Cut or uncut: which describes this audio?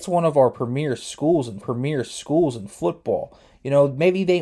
cut